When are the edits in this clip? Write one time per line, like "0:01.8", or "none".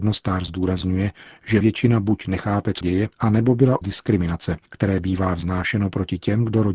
0:01.6
0:02.8
0:03.1
0:03.8
0:04.7